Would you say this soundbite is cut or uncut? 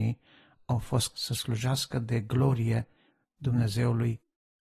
cut